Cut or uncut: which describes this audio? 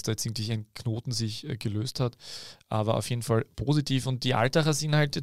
uncut